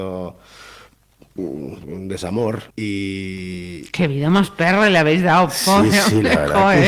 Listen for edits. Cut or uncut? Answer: cut